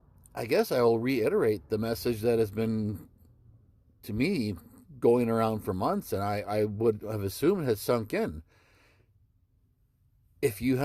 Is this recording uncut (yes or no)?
yes